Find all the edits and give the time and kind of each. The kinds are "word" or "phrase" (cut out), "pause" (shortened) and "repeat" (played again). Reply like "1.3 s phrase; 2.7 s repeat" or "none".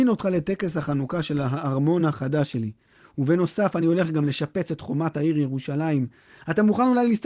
none